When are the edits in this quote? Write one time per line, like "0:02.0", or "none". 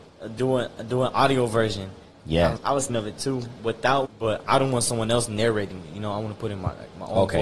0:02.6
0:02.9
0:04.1